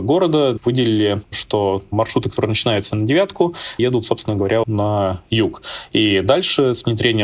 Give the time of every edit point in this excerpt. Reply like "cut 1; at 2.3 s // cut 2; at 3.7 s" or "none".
cut 1; at 1.2 s // cut 2; at 3.8 s // cut 3; at 4.6 s